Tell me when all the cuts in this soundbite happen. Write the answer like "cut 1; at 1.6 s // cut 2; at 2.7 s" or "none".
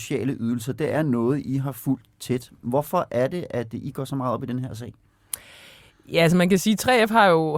none